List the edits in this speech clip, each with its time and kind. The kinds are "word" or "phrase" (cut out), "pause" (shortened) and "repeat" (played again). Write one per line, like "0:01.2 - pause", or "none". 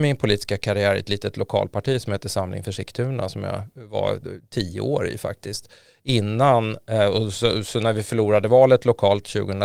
none